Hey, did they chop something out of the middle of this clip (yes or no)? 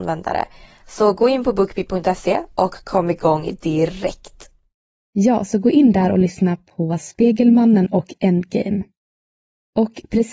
no